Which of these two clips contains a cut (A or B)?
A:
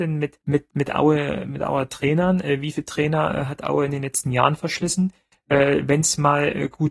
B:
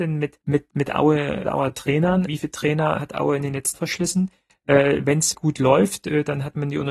B